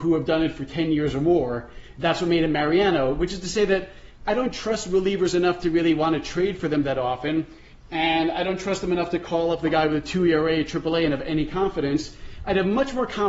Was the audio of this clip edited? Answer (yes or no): no